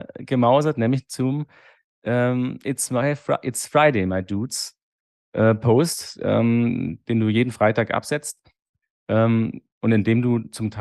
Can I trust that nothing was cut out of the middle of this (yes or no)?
yes